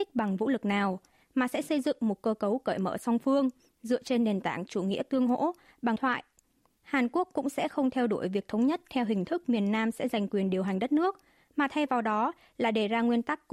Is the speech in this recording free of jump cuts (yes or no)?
no